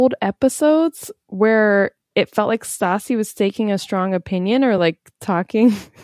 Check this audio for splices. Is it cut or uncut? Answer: uncut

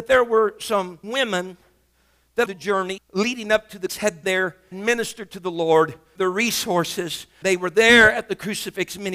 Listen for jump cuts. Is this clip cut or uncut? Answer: cut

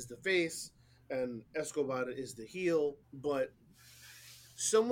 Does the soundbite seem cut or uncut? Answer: cut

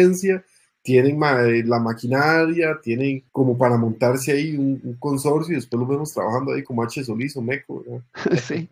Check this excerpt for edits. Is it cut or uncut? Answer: cut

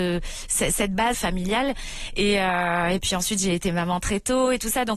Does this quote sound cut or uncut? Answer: cut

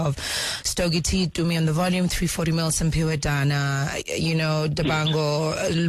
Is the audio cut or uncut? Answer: uncut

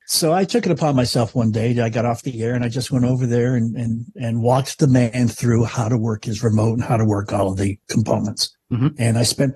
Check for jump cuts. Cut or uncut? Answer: uncut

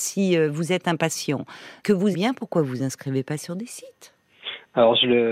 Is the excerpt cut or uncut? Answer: cut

